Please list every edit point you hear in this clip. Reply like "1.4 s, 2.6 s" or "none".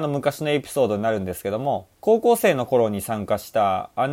1.9 s